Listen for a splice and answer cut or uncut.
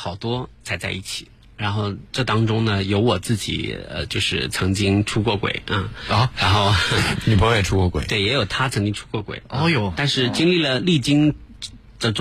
uncut